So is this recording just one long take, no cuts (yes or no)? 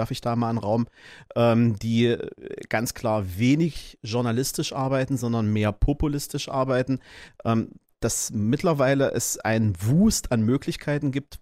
yes